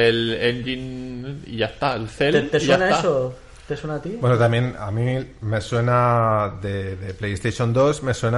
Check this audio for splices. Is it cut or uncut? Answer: uncut